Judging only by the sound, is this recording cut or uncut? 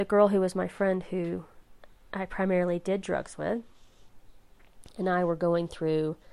uncut